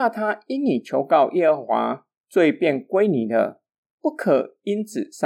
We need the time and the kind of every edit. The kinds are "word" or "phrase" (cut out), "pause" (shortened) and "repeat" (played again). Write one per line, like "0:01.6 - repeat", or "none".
none